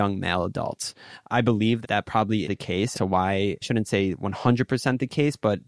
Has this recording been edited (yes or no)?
yes